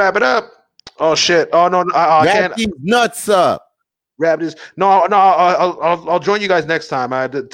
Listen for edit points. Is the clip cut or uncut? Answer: uncut